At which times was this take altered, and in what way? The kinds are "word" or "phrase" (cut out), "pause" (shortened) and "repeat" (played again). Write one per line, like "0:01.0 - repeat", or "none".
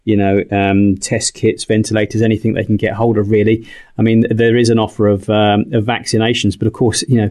none